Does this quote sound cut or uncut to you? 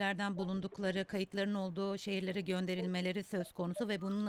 uncut